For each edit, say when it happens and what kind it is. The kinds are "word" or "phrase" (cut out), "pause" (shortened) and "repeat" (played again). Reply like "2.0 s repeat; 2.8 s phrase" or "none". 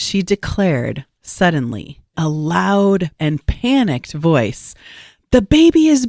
2.1 s word; 3.2 s word